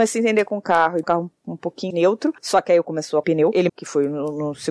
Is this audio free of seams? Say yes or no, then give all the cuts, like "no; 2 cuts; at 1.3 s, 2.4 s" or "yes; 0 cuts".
no; 6 cuts; at 1.0 s, 1.9 s, 2.4 s, 2.8 s, 3.2 s, 3.7 s